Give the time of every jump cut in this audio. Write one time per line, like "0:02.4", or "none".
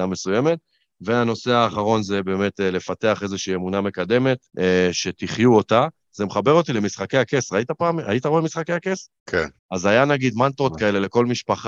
0:04.5
0:09.2
0:09.6